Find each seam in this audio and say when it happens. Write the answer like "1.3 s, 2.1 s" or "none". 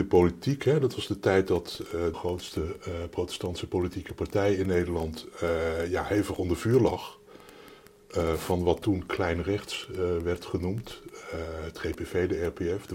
2.1 s